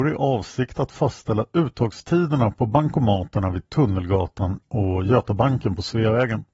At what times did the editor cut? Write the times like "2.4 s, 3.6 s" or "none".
none